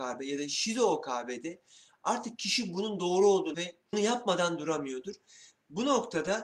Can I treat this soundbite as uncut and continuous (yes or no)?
no